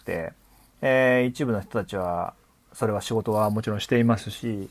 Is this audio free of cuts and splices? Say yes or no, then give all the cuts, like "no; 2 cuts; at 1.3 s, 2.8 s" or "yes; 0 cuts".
yes; 0 cuts